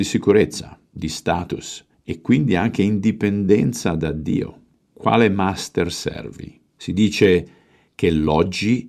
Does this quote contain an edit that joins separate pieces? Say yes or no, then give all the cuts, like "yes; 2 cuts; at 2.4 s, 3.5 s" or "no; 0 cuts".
yes; 3 cuts; at 1.9 s, 4.7 s, 6.7 s